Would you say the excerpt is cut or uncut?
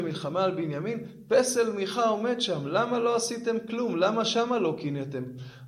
uncut